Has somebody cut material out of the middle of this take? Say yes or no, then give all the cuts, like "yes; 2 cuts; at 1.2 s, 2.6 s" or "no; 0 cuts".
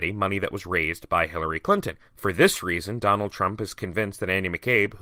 yes; 1 cut; at 2.0 s